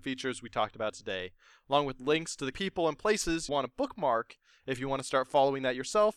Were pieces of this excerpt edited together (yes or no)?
yes